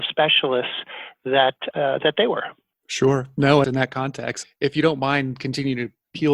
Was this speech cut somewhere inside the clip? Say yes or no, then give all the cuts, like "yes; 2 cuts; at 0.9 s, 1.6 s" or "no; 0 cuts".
yes; 3 cuts; at 1.7 s, 3.6 s, 4.4 s